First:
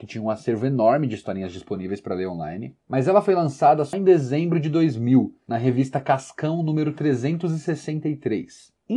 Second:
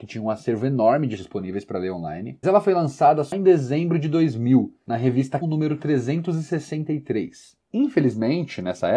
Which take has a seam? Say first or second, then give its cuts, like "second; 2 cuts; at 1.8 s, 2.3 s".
second; 3 cuts; at 1.2 s, 2.4 s, 5.4 s